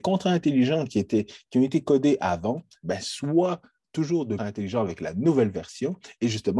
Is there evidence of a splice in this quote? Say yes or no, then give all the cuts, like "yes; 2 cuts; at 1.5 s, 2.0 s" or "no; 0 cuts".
yes; 1 cut; at 4.4 s